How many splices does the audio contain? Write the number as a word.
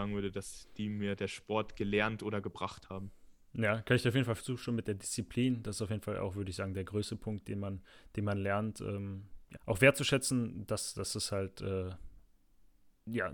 one